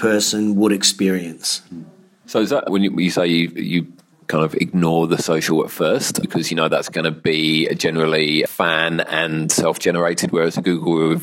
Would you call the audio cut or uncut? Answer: uncut